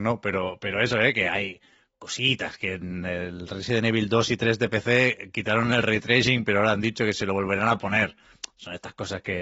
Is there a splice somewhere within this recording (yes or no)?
no